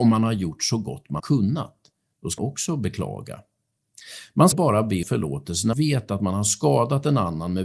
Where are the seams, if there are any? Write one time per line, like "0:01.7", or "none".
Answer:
0:01.2
0:02.4
0:04.5
0:05.0
0:05.7